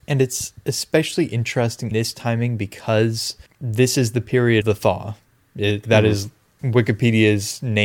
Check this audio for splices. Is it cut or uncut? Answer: cut